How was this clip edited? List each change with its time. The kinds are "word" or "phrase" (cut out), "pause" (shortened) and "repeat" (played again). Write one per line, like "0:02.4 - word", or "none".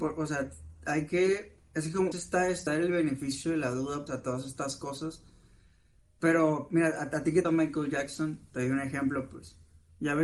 0:02.1 - word
0:02.7 - word
0:04.1 - word
0:07.4 - word